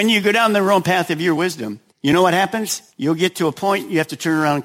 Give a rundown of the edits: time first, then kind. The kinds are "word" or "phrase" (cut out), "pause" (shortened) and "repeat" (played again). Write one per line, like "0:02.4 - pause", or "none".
0:01.9 - pause
0:02.9 - pause